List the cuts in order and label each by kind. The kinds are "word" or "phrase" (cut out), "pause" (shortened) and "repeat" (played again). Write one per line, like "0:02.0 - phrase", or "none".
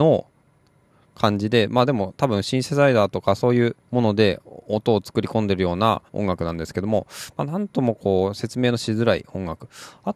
0:03.8 - pause
0:06.1 - pause